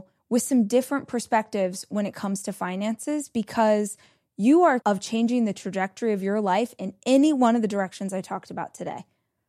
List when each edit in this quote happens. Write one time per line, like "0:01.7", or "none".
0:04.8